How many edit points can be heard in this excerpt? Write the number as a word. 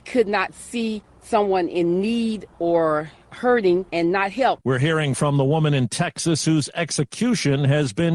one